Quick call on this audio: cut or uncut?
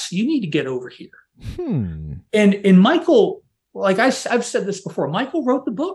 uncut